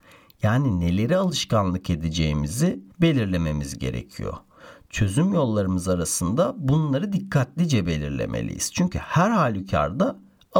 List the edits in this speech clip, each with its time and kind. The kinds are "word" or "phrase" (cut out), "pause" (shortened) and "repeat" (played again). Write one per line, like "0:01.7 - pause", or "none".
0:02.9 - pause